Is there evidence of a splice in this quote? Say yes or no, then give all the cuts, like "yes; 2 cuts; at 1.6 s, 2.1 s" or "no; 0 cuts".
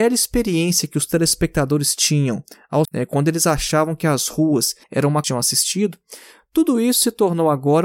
yes; 3 cuts; at 2.8 s, 4.8 s, 5.2 s